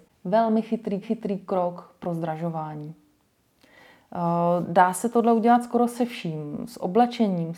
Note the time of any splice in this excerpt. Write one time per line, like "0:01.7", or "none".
0:01.0